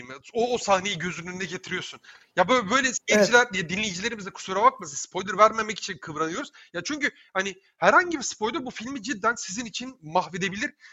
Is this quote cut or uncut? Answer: uncut